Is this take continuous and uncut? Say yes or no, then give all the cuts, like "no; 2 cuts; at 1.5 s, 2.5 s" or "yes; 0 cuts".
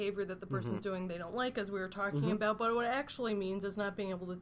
yes; 0 cuts